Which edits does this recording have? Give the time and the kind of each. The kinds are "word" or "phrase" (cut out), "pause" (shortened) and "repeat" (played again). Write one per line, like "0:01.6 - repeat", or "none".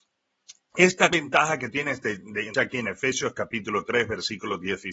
0:01.1 - word
0:01.7 - word
0:02.5 - word